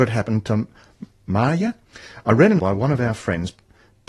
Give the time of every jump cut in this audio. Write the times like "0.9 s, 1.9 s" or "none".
2.6 s